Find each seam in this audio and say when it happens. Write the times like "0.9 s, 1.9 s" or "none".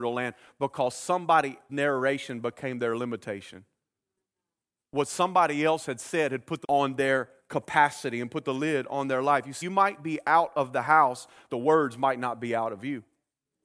1.7 s, 6.6 s, 9.6 s, 11.5 s